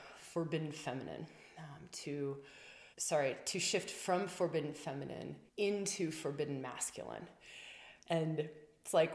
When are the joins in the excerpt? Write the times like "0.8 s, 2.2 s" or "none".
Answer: 2.9 s, 5.5 s, 8.0 s